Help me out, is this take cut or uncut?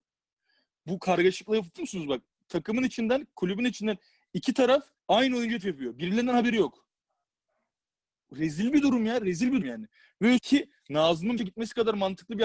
cut